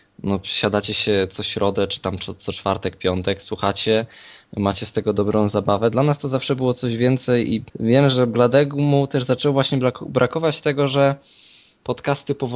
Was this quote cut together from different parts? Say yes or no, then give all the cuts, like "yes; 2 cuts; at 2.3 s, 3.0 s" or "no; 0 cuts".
yes; 1 cut; at 7.7 s